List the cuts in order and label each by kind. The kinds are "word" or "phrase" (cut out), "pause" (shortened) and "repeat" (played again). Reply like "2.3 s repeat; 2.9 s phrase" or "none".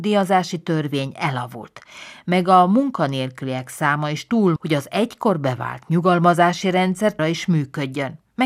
4.6 s phrase; 7.2 s word